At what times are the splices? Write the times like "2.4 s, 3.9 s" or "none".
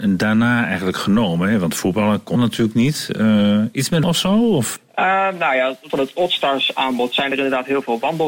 2.4 s, 4.0 s, 5.9 s

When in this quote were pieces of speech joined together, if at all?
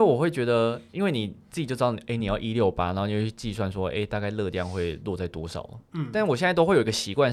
none

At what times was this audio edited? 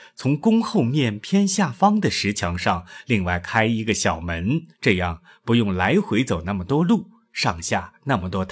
4.7 s

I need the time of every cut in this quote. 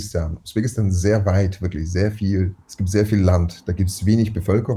2.6 s

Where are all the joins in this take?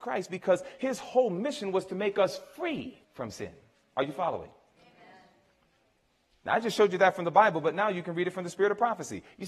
3.0 s

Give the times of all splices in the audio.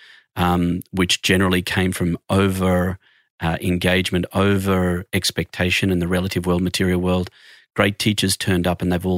none

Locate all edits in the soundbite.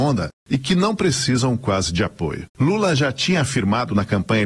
2.5 s

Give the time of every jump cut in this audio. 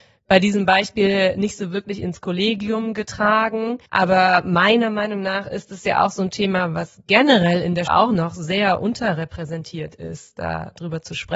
3.9 s, 7.9 s

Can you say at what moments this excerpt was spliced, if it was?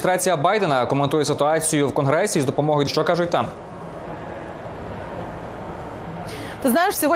2.9 s

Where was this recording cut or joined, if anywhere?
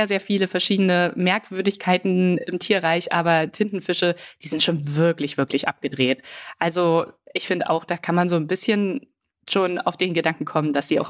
none

